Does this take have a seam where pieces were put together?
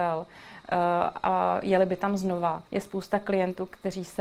yes; 1 cut; at 2.7 s

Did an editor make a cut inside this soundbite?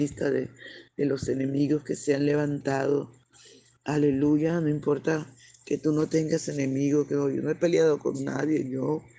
no; 0 cuts

